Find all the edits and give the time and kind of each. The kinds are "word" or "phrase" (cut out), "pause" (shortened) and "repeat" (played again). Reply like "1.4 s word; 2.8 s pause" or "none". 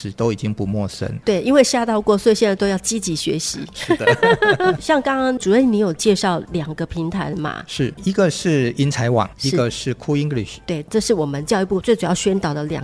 8.0 s word